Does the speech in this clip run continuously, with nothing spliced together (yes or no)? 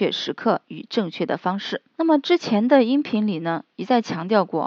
no